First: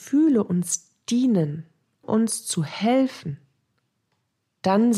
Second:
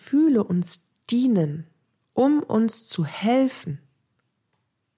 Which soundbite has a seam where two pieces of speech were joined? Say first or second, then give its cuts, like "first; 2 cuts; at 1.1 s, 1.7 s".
first; 1 cut; at 2.0 s